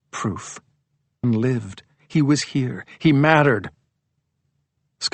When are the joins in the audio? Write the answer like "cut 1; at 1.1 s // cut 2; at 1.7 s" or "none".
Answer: cut 1; at 1.2 s